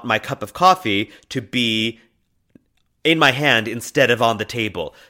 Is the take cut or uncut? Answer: uncut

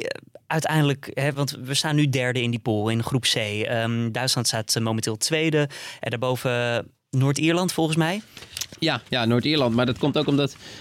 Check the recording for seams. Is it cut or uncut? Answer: uncut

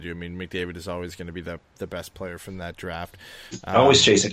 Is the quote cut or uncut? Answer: uncut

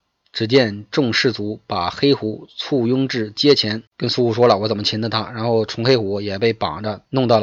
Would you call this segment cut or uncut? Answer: cut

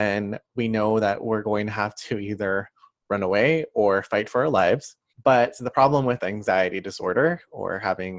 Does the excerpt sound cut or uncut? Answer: cut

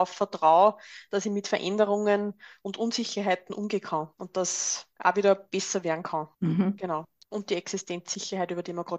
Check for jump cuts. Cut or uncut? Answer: uncut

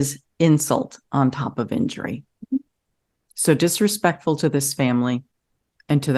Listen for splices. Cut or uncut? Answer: uncut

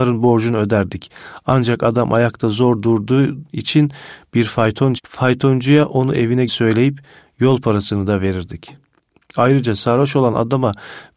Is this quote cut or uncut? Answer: cut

